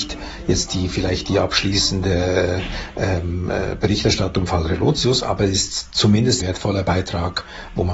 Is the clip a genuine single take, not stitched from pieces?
no; 2 cuts; at 4.5 s, 6.4 s

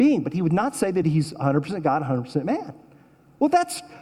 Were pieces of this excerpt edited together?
no; 0 cuts

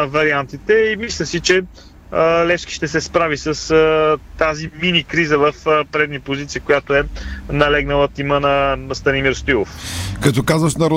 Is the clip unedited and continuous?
yes; 0 cuts

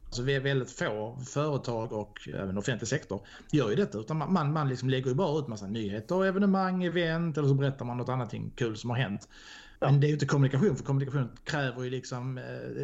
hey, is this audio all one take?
no; 1 cut; at 9.8 s

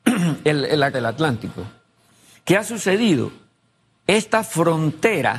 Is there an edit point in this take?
yes; 1 cut; at 0.9 s

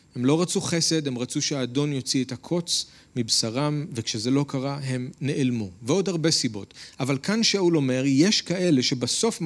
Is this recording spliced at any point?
no; 0 cuts

